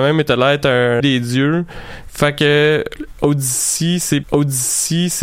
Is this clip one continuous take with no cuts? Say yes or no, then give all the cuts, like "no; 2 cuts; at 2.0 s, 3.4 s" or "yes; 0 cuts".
no; 2 cuts; at 1.0 s, 4.2 s